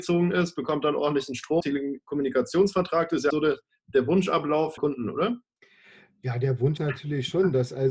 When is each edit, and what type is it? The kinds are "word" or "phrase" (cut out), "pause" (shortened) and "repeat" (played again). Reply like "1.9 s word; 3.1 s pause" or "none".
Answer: 1.6 s word; 3.3 s word; 4.8 s word; 6.8 s word